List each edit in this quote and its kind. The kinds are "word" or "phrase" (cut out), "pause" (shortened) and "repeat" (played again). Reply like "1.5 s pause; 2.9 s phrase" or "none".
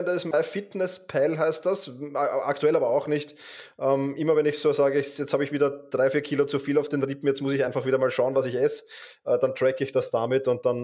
none